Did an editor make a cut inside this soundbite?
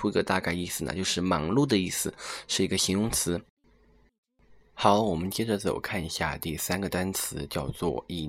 no; 0 cuts

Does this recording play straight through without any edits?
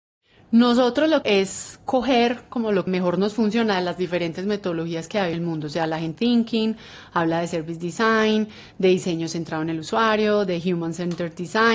no; 4 cuts; at 1.2 s, 2.9 s, 5.3 s, 6.1 s

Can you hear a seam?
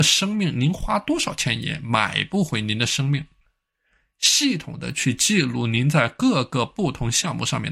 no; 0 cuts

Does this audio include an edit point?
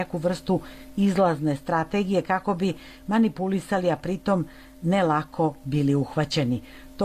no; 0 cuts

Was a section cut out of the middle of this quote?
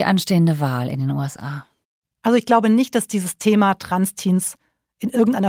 no; 0 cuts

